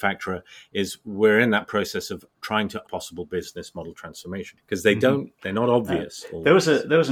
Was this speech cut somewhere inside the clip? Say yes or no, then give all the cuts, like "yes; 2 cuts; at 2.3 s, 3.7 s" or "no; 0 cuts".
yes; 1 cut; at 2.8 s